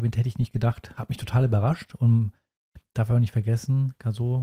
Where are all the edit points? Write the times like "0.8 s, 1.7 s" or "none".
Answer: none